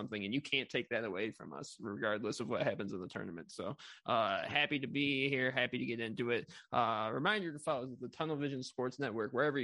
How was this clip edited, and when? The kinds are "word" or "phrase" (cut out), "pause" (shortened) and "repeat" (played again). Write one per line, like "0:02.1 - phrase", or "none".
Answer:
none